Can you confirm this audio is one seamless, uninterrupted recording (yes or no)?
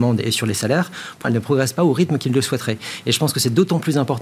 no